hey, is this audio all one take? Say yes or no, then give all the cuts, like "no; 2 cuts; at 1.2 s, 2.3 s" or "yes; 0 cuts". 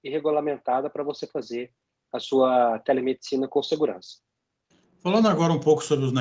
yes; 0 cuts